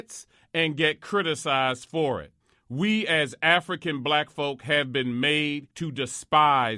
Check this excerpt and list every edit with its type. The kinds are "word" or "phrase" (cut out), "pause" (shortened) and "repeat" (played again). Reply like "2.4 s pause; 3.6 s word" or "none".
2.4 s pause; 5.7 s pause

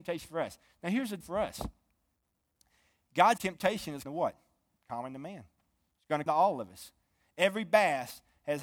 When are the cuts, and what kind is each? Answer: 1.2 s word; 3.4 s word; 4.1 s word; 6.3 s word

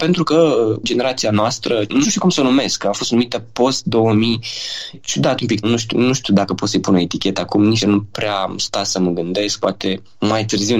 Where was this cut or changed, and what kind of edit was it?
2.0 s word; 4.9 s word; 5.6 s word; 7.8 s word

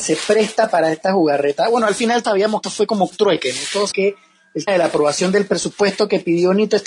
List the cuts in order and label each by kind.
2.2 s word; 2.6 s word; 3.1 s word; 3.9 s word; 4.7 s word

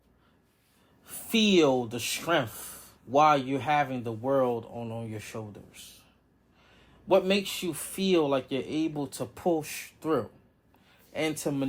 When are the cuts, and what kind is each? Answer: 3.0 s pause

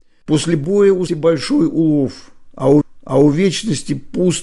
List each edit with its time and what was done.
1.1 s word; 2.8 s repeat

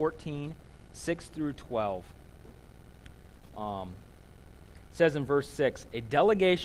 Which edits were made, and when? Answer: none

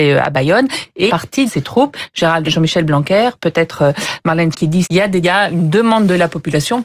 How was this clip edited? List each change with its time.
1.1 s word; 1.5 s word; 2.4 s word; 4.5 s word; 4.8 s word; 5.2 s word

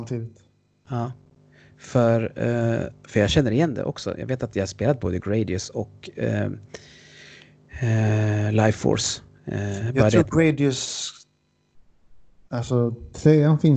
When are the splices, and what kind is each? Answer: none

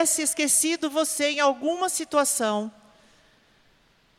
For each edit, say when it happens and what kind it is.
none

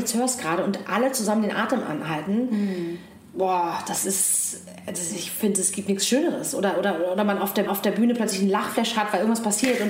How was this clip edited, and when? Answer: 7.7 s repeat

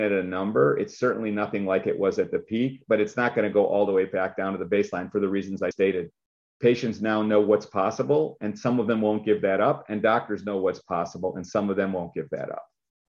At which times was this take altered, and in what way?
5.7 s word

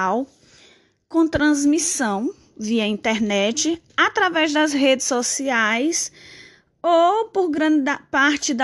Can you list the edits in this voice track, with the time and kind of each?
3.9 s pause

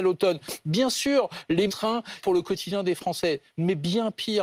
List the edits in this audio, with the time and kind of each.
1.7 s phrase; 2.2 s phrase

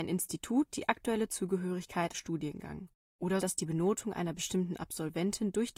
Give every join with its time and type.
2.1 s phrase; 3.4 s word

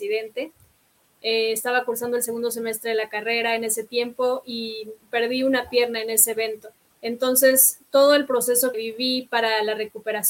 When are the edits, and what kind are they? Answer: 6.8 s pause; 8.7 s word

